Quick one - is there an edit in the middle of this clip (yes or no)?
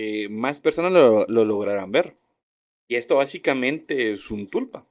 no